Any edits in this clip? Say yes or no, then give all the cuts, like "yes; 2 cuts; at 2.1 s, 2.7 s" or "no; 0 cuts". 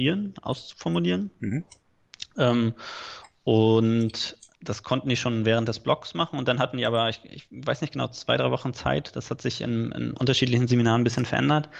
no; 0 cuts